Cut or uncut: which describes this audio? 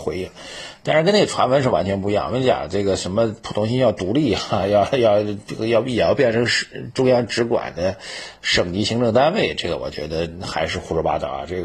uncut